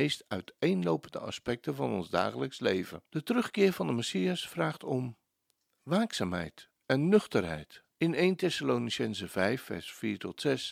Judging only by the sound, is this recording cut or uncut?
cut